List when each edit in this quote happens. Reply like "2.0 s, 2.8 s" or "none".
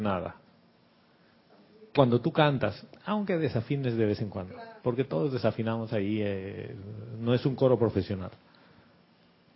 1.9 s, 4.8 s